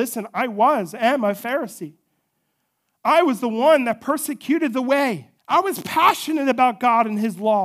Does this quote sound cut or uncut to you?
cut